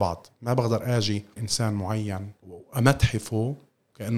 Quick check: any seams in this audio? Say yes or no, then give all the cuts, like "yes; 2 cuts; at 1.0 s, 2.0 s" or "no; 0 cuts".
yes; 1 cut; at 1.4 s